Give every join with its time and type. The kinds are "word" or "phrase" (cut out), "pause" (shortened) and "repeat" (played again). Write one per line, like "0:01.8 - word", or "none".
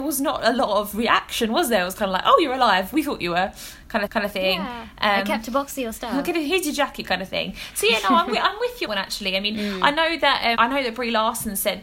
0:04.1 - repeat
0:08.8 - phrase
0:10.5 - word